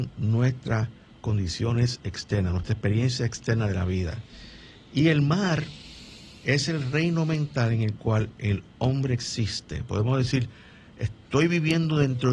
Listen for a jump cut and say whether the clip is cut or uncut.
uncut